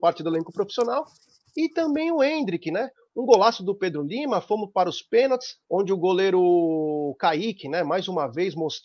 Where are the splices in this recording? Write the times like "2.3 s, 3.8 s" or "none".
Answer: 5.6 s